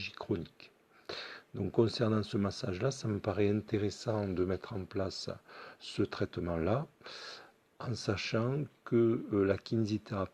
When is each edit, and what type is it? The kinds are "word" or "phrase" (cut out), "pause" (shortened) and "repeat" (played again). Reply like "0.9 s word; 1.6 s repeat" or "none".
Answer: none